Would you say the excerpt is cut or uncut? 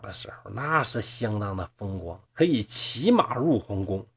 cut